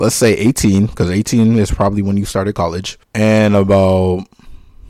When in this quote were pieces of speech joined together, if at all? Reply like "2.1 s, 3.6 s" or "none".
3.0 s